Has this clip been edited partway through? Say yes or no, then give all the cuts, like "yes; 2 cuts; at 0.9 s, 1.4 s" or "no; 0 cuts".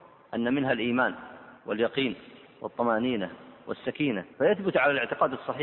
yes; 2 cuts; at 1.6 s, 4.3 s